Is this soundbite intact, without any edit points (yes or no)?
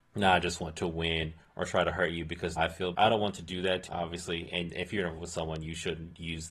no